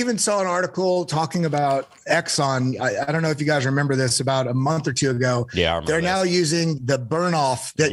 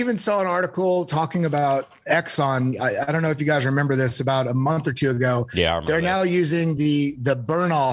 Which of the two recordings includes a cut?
first; 1 cut; at 6.8 s

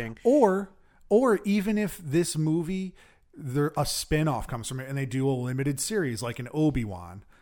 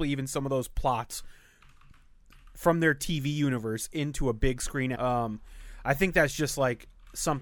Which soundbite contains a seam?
second; 1 cut; at 4.9 s

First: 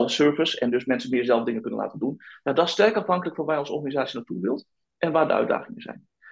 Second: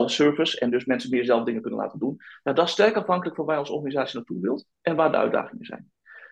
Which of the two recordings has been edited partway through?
second; 1 cut; at 4.7 s

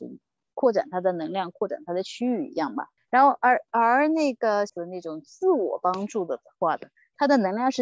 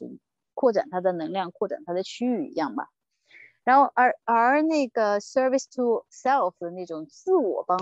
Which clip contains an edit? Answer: first; 2 cuts; at 3.0 s, 4.7 s

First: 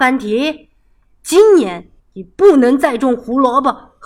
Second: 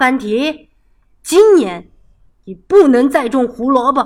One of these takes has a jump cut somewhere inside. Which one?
first; 1 cut; at 2.0 s

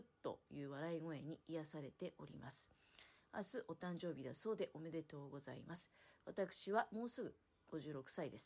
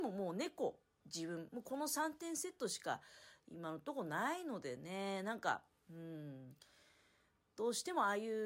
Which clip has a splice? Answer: second; 1 cut; at 1.0 s

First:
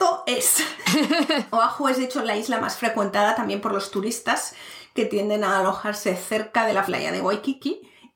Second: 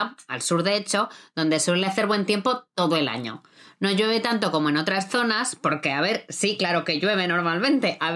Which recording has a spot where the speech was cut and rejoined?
first; 1 cut; at 6.9 s

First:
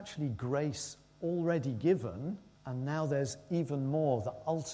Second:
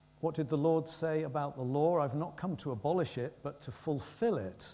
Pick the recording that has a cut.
first; 1 cut; at 2.5 s

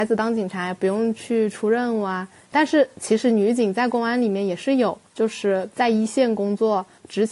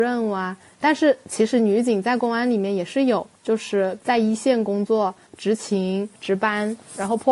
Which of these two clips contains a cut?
second; 1 cut; at 6.2 s

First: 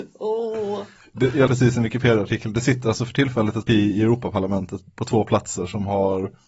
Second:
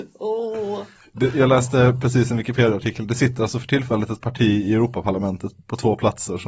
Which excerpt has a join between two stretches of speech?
first; 2 cuts; at 1.5 s, 3.7 s

